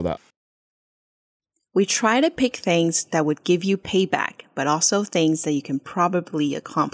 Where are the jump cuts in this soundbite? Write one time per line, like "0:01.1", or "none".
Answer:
none